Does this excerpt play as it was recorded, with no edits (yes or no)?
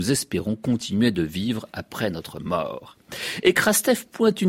yes